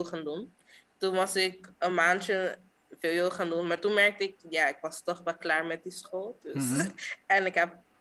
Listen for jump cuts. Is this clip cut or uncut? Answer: uncut